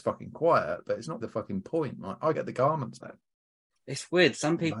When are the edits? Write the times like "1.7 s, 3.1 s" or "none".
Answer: 1.2 s, 2.3 s, 3.0 s